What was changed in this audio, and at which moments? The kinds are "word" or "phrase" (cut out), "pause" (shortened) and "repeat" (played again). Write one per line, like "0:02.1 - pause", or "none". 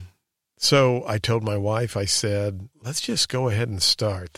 0:02.7 - pause